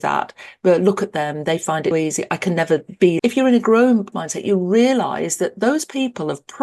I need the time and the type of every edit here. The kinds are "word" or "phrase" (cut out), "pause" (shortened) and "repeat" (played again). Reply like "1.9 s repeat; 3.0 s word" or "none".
1.9 s word; 3.2 s phrase; 4.1 s word